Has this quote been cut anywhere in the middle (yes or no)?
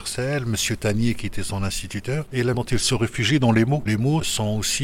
yes